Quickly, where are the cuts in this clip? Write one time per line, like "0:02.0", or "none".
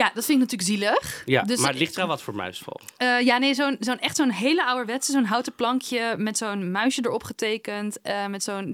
none